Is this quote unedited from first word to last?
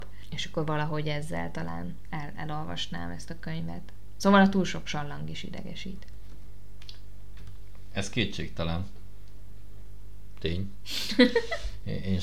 yes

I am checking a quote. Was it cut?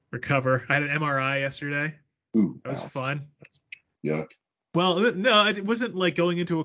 no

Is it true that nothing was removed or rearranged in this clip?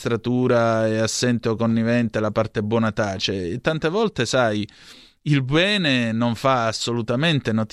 yes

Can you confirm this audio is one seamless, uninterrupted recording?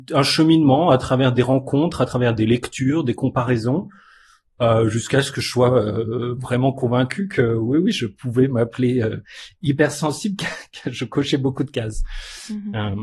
yes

